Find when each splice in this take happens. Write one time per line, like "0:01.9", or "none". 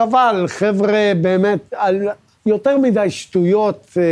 0:01.7